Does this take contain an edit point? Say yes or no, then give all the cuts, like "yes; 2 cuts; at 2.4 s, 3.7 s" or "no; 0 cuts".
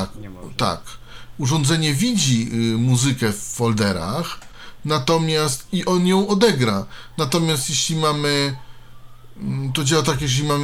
no; 0 cuts